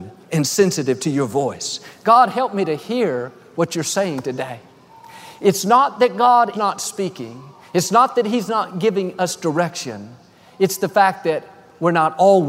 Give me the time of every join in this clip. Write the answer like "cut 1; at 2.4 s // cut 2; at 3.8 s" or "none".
cut 1; at 6.5 s